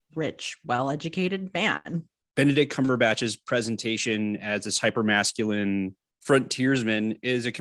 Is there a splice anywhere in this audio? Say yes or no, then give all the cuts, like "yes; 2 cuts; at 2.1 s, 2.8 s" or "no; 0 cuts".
no; 0 cuts